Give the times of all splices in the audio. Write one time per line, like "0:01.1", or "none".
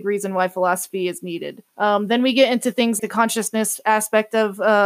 0:01.7
0:03.0